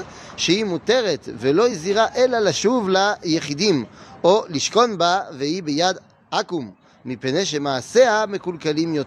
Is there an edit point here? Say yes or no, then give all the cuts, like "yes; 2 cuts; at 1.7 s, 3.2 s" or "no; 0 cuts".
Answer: no; 0 cuts